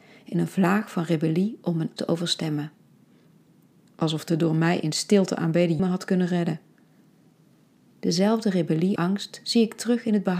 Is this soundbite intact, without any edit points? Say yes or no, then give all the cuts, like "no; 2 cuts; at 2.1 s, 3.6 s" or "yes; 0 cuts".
no; 3 cuts; at 2.0 s, 5.8 s, 9.0 s